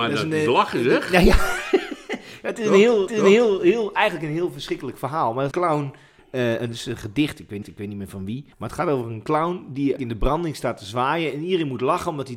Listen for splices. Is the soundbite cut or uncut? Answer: cut